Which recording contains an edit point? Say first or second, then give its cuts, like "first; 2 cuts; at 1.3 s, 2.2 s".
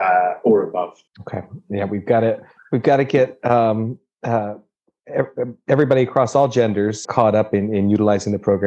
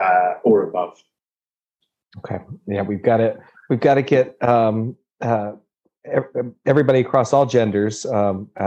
first; 2 cuts; at 1.1 s, 7.0 s